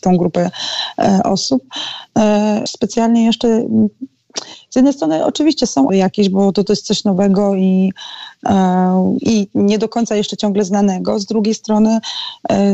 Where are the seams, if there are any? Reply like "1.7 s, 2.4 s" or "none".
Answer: 2.7 s, 5.9 s